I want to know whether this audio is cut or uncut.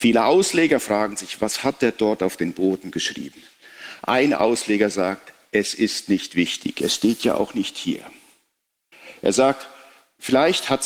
uncut